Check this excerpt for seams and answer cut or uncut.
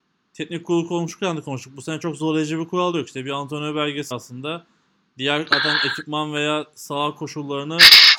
cut